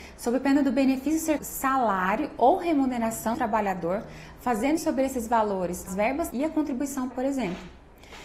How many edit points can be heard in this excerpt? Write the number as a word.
six